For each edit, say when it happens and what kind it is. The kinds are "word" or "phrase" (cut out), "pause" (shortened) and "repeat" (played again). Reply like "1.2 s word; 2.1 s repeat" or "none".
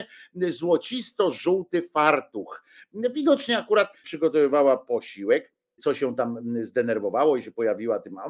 4.0 s word; 5.8 s word